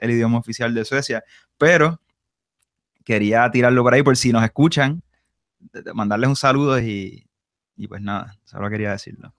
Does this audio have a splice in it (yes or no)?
no